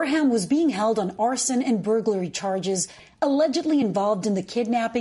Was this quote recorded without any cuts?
yes; 0 cuts

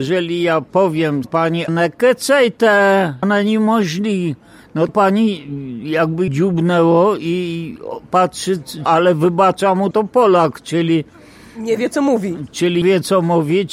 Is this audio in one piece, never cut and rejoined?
no; 8 cuts; at 1.2 s, 1.7 s, 3.2 s, 4.9 s, 6.3 s, 8.9 s, 9.9 s, 12.8 s

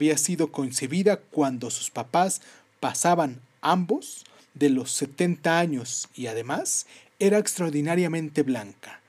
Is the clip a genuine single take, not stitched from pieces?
yes; 0 cuts

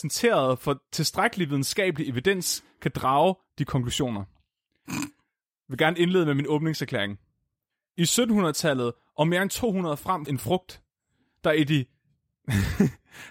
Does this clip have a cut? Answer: yes; 2 cuts; at 3.7 s, 10.3 s

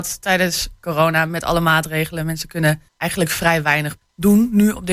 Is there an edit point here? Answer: yes; 2 cuts; at 2.9 s, 4.0 s

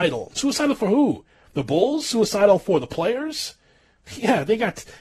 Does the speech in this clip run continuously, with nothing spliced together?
yes; 0 cuts

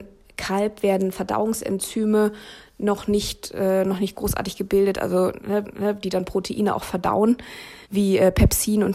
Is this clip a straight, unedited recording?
no; 2 cuts; at 5.6 s, 7.8 s

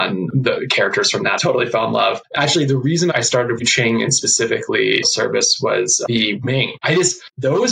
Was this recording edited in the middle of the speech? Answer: yes; 5 cuts; at 1.4 s, 3.1 s, 3.6 s, 5.0 s, 6.4 s

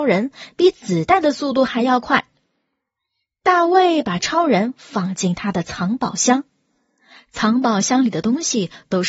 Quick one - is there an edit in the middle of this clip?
no; 0 cuts

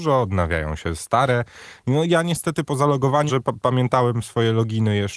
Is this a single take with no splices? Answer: no; 1 cut; at 3.3 s

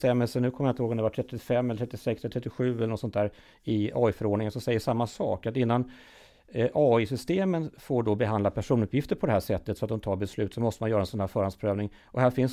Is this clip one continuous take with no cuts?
yes; 0 cuts

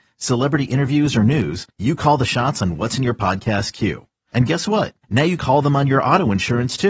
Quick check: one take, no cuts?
no; 3 cuts; at 1.7 s, 5.0 s, 5.4 s

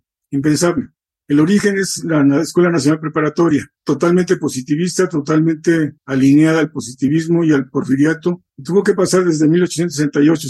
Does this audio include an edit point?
yes; 3 cuts; at 3.8 s, 6.0 s, 8.5 s

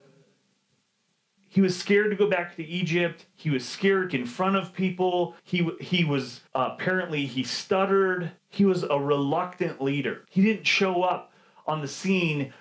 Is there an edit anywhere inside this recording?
yes; 6 cuts; at 1.4 s, 4.1 s, 5.4 s, 6.5 s, 8.4 s, 10.3 s

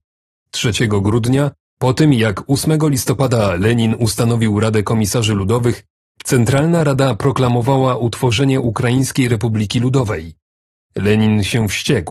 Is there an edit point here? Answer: no; 0 cuts

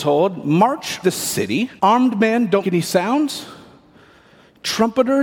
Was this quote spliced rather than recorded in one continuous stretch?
yes; 3 cuts; at 1.0 s, 1.8 s, 2.6 s

